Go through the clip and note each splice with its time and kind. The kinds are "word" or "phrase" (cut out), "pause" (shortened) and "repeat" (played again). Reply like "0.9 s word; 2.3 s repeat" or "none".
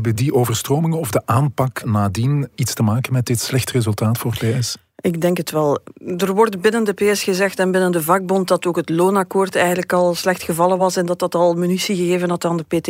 none